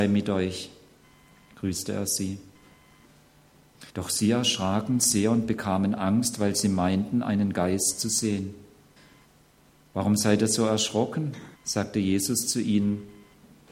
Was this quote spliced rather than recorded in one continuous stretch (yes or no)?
yes